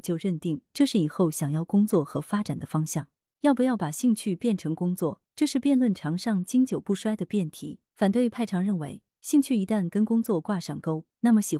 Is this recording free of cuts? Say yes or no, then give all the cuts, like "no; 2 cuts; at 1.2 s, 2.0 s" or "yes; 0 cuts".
no; 1 cut; at 7.9 s